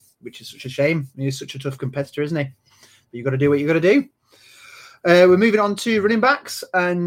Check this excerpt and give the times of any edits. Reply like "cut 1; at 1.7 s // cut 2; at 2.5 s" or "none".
none